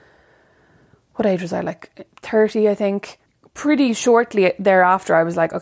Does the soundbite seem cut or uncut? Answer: cut